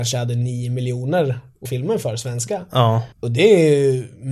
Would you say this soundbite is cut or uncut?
cut